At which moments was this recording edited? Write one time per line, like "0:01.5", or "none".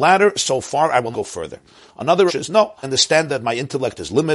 0:01.1
0:02.3
0:02.8